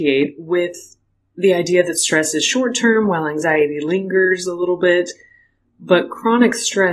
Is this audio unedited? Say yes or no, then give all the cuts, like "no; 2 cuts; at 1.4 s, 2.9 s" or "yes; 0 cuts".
yes; 0 cuts